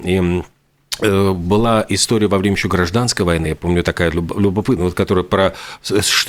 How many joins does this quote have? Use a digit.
0